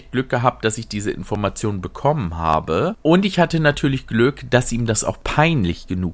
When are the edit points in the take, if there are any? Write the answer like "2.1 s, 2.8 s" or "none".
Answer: none